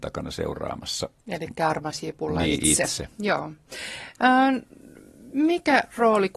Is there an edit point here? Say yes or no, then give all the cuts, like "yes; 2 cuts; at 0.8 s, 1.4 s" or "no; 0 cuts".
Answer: yes; 1 cut; at 1.2 s